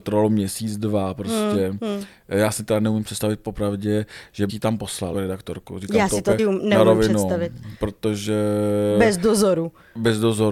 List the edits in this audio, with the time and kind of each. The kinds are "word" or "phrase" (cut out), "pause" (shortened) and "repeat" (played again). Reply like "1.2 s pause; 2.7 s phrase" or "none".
4.5 s word; 5.1 s word; 6.4 s word